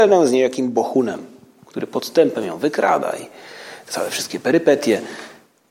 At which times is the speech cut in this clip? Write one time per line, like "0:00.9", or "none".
none